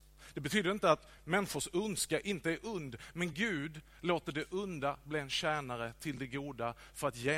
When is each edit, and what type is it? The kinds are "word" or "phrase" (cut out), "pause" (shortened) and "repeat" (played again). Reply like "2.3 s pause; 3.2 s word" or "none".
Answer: none

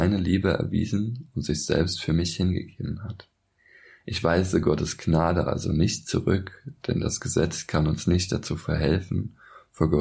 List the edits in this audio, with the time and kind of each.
none

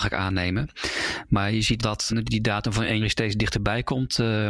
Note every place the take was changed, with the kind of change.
1.8 s word; 2.1 s word; 3.0 s word

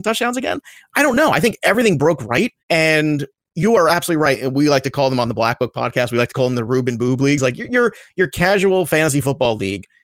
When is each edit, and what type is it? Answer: 2.6 s pause

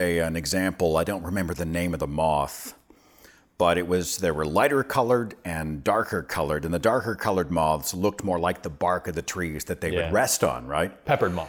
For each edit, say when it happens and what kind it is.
none

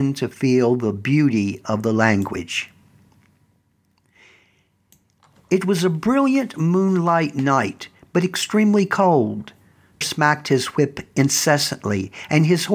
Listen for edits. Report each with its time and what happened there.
10.0 s word

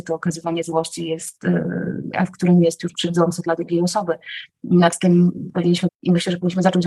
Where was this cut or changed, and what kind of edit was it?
2.1 s word; 5.9 s word

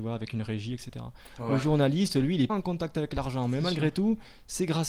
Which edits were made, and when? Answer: 2.5 s word

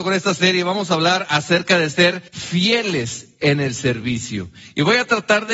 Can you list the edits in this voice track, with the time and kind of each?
2.3 s pause

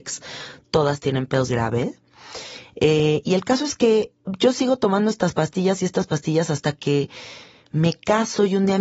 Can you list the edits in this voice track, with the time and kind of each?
1.5 s phrase

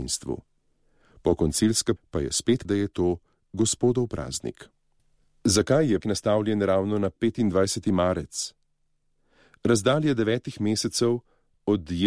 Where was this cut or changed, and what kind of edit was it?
2.0 s phrase; 2.6 s word; 6.0 s word

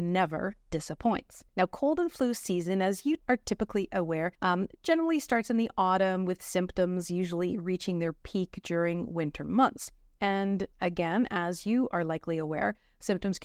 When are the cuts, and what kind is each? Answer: 1.5 s pause; 3.2 s pause; 4.3 s pause; 10.7 s pause

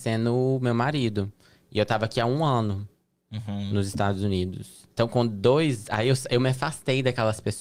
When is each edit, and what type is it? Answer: 4.9 s pause

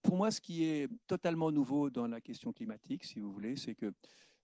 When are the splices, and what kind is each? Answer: 1.0 s pause

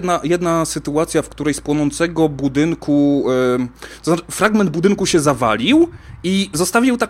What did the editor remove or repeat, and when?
none

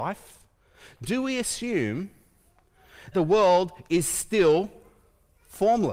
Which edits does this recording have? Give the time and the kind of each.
3.1 s word

